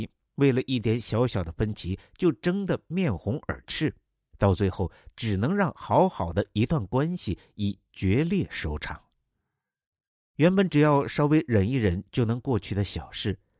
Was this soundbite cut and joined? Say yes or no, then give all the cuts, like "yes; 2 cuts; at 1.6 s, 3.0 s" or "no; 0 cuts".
no; 0 cuts